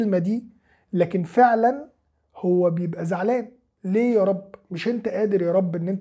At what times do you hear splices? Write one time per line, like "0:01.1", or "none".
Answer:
none